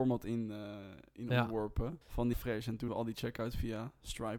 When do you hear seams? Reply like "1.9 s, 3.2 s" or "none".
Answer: 2.0 s, 2.3 s, 2.9 s